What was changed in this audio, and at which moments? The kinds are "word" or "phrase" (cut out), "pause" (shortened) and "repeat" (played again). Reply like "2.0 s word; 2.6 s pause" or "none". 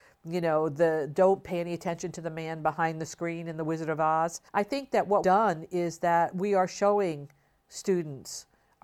4.5 s pause; 5.2 s word